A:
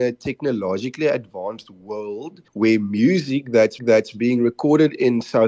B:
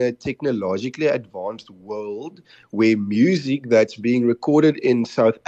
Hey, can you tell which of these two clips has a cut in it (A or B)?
A